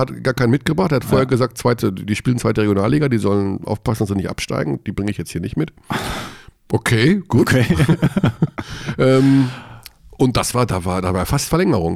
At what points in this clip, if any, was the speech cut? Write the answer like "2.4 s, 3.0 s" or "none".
none